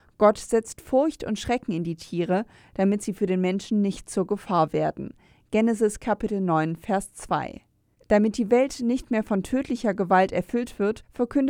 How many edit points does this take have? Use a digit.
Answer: 0